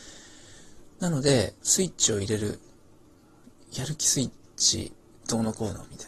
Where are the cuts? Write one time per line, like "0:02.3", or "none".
0:00.9
0:01.6
0:04.4

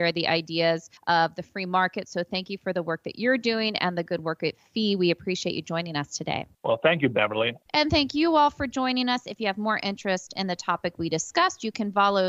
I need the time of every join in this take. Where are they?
0:01.0
0:06.5
0:07.6

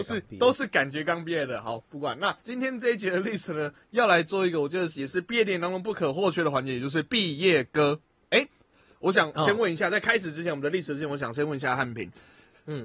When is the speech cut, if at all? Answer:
0:02.4

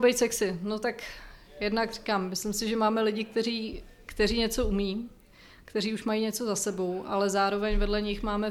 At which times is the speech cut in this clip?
none

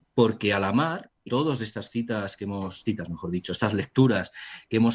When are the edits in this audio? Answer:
0:01.3
0:02.9

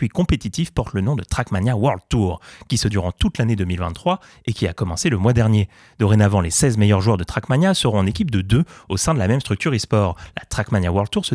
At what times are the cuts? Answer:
0:02.9

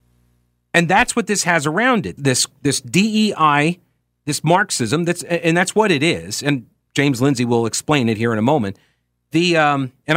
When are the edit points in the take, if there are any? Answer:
0:02.2

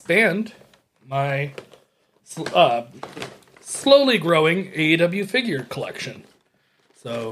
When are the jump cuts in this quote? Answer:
none

